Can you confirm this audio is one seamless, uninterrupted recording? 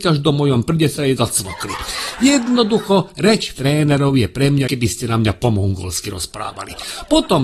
no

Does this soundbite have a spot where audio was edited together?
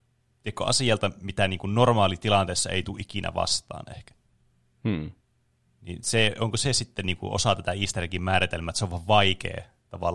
no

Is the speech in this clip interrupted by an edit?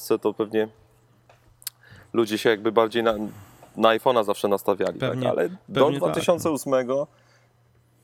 no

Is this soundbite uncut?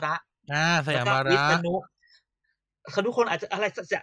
yes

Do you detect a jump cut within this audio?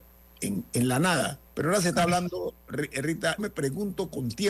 yes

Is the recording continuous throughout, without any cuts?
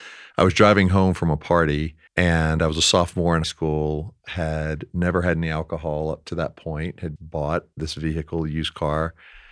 no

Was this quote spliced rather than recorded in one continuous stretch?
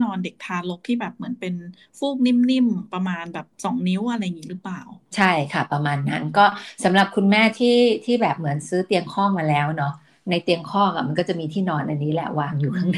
no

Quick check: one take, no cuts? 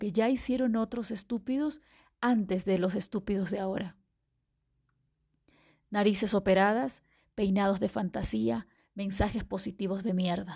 yes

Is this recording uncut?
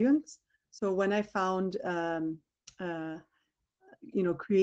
yes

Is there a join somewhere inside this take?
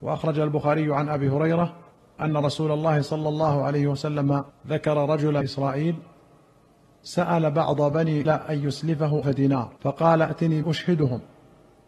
yes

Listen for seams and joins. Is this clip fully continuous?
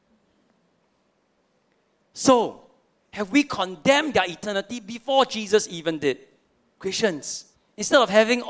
no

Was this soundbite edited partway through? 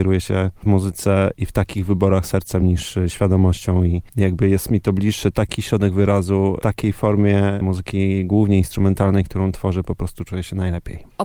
no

